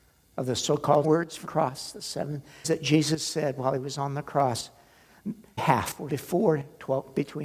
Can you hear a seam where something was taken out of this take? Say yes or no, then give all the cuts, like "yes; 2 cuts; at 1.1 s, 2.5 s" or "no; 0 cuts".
yes; 5 cuts; at 1.0 s, 1.4 s, 2.6 s, 5.6 s, 6.1 s